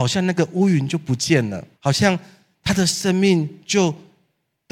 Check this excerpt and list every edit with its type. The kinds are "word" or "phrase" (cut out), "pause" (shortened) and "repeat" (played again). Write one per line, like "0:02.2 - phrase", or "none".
0:01.7 - pause